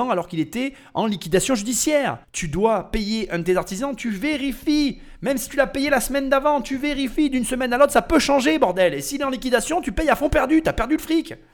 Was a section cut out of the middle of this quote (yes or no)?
yes